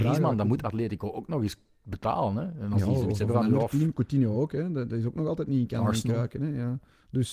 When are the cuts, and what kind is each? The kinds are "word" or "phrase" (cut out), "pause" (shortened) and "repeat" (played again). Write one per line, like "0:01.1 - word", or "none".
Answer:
none